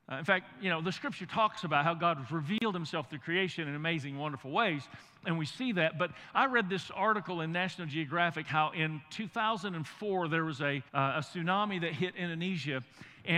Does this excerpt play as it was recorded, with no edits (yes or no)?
no